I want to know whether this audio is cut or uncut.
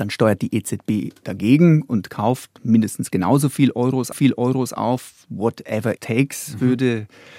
cut